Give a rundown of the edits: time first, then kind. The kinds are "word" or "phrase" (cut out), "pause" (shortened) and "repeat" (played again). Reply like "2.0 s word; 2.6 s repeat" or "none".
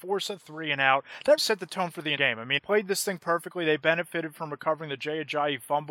1.4 s word; 2.2 s word; 2.6 s word